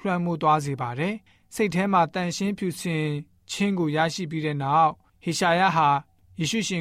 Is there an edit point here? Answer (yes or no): no